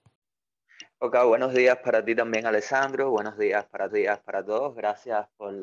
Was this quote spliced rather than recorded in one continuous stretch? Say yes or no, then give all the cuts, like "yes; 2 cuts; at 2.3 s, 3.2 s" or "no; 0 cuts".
yes; 1 cut; at 3.9 s